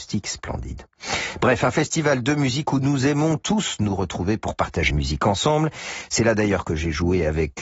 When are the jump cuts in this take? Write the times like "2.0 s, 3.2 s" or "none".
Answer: 4.9 s